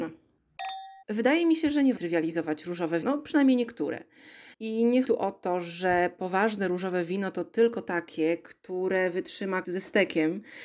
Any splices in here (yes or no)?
yes